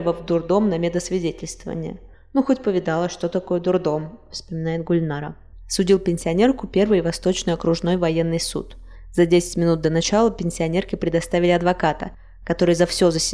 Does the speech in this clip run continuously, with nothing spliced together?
yes; 0 cuts

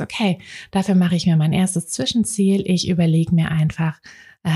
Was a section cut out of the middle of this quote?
no; 0 cuts

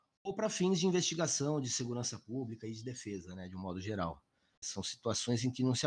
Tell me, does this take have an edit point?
no; 0 cuts

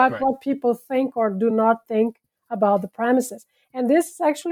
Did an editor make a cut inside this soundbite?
no; 0 cuts

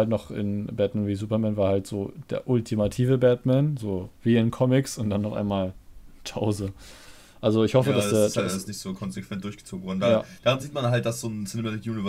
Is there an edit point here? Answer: no; 0 cuts

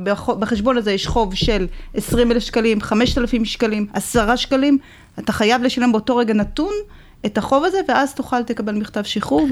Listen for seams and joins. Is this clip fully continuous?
yes; 0 cuts

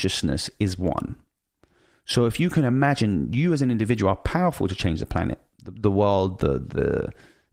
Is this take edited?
no; 0 cuts

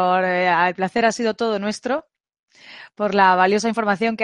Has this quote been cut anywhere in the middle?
no; 0 cuts

